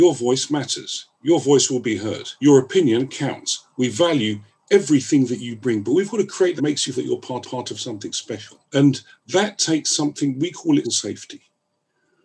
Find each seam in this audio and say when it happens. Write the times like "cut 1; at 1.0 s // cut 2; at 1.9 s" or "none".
cut 1; at 2.4 s // cut 2; at 6.6 s // cut 3; at 6.9 s // cut 4; at 7.4 s // cut 5; at 8.6 s // cut 6; at 10.8 s